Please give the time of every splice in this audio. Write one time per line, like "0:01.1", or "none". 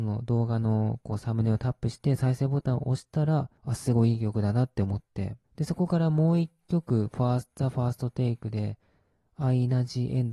0:03.6
0:05.4

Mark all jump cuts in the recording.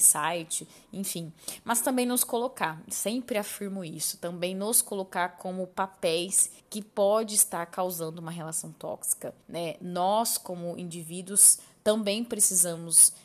0:06.6
0:09.4

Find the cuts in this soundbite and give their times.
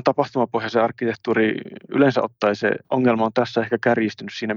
0:02.8

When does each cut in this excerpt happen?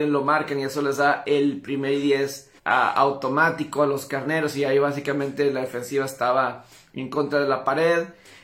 0:02.6

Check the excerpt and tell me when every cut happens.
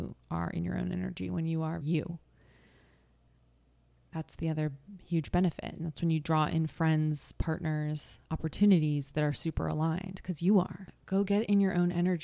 0:01.8
0:08.2

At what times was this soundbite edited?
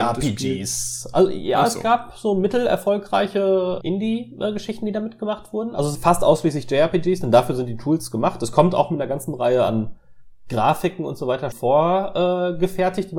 0:03.8
0:05.9
0:11.5

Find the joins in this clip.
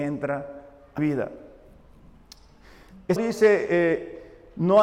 0:01.0
0:03.2

